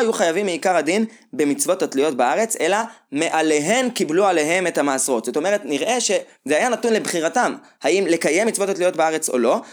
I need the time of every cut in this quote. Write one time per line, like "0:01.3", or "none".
none